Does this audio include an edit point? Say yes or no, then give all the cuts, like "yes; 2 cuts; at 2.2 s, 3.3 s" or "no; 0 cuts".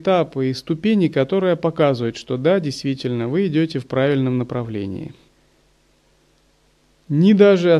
no; 0 cuts